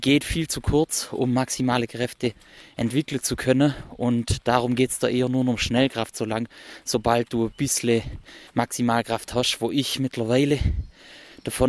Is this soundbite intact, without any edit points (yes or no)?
no